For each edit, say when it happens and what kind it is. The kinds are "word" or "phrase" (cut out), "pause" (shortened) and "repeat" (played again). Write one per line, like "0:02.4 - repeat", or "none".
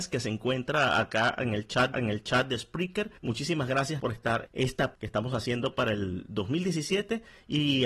0:01.9 - repeat
0:03.2 - pause
0:04.0 - word
0:04.5 - word
0:04.9 - word

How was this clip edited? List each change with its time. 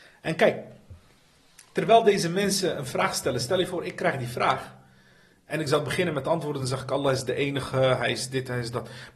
none

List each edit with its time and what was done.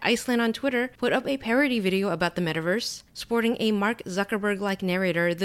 0:01.0 - pause
0:03.1 - pause

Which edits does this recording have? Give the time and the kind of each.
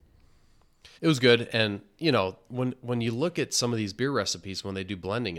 0:01.0 - pause

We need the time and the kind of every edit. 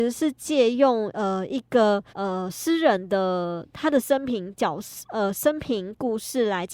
0:02.1 - pause

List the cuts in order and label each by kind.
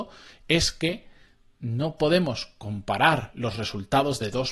none

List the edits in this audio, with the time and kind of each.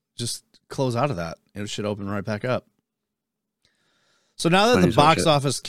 none

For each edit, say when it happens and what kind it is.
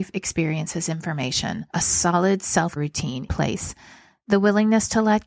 0:01.7 - pause
0:02.8 - word
0:03.3 - word

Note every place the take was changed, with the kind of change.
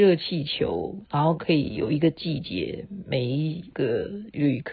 0:03.7 - pause

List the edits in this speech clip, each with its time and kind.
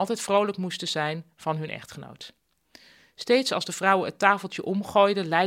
none

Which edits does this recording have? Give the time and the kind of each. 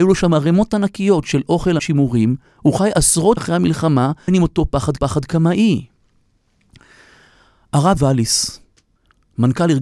0:01.8 - phrase
0:03.4 - word
0:04.3 - word
0:05.0 - repeat
0:08.0 - word

